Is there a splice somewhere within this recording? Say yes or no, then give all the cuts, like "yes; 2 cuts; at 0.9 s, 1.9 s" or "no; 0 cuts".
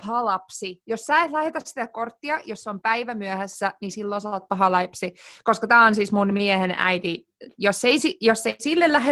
no; 0 cuts